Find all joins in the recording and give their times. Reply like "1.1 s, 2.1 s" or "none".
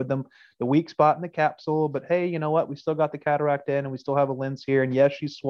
none

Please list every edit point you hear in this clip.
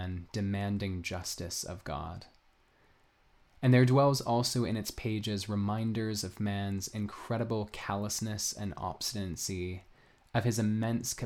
none

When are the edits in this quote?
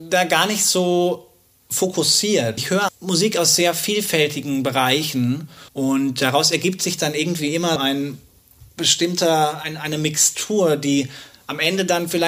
2.6 s, 2.9 s, 5.7 s, 7.8 s

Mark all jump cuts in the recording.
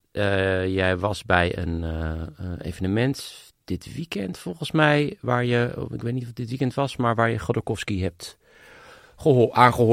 none

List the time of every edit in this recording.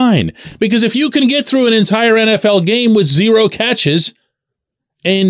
none

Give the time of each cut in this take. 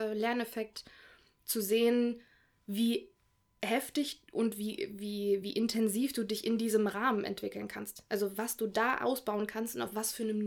none

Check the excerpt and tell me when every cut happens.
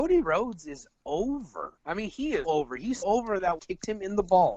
1.8 s, 2.4 s, 3.0 s, 3.6 s

